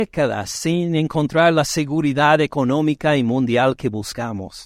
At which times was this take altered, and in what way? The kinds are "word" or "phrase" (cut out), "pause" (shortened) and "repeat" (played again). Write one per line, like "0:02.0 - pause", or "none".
none